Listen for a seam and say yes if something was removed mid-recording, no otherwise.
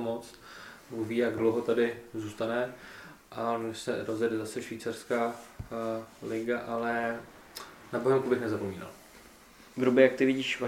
no